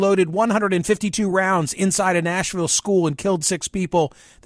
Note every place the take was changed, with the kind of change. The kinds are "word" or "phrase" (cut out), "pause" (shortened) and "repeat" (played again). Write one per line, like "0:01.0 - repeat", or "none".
none